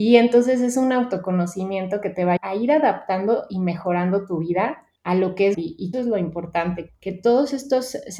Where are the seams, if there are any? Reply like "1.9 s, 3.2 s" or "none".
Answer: 2.4 s, 5.0 s, 5.5 s, 5.9 s, 6.9 s